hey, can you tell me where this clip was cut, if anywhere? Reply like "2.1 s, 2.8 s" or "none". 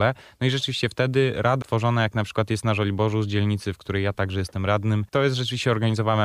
1.6 s, 5.1 s